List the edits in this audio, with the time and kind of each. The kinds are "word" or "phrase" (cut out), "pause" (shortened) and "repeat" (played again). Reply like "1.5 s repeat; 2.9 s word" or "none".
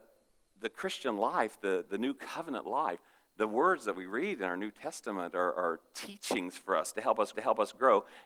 7.3 s repeat